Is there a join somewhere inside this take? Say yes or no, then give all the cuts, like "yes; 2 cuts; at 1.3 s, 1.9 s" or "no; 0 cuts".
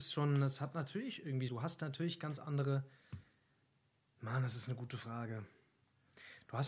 yes; 1 cut; at 1.5 s